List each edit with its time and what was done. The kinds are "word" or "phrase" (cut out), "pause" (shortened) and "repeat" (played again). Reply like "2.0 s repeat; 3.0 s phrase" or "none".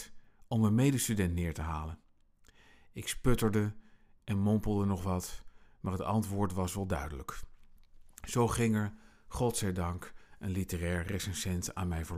none